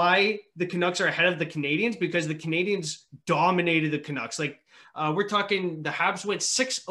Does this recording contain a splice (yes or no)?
no